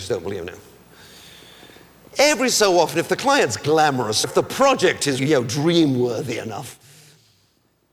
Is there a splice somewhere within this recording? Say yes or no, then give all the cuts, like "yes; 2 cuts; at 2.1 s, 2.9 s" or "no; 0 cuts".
yes; 2 cuts; at 4.2 s, 5.2 s